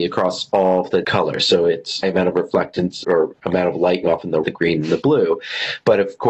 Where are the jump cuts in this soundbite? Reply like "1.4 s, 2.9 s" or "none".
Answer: 1.0 s, 2.0 s, 3.0 s, 4.0 s, 4.4 s